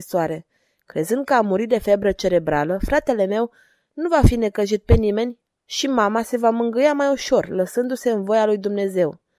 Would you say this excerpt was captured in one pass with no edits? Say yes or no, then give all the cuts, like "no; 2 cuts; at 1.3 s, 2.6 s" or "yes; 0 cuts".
yes; 0 cuts